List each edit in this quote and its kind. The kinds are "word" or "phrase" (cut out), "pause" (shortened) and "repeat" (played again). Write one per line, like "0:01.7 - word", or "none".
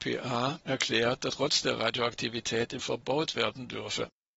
0:01.3 - word
0:02.8 - word